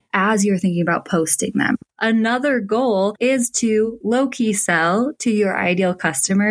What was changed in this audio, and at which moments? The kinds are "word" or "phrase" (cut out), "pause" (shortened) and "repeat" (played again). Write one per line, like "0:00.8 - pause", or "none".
0:04.0 - word